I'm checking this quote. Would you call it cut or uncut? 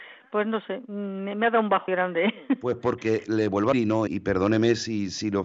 cut